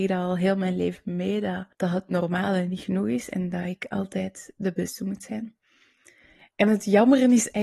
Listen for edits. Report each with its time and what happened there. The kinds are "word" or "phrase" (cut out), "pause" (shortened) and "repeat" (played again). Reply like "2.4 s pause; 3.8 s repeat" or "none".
1.7 s pause